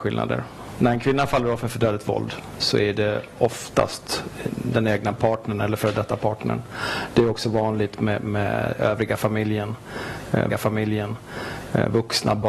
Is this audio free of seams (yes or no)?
no